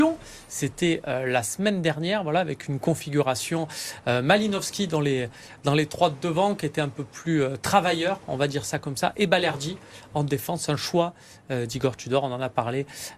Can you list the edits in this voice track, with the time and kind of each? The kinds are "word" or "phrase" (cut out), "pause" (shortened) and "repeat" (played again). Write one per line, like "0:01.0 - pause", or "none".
none